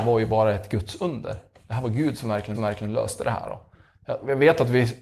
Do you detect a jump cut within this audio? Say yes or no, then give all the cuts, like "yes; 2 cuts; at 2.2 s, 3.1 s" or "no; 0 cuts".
yes; 1 cut; at 2.5 s